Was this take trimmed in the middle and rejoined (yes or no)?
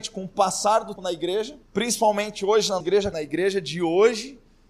yes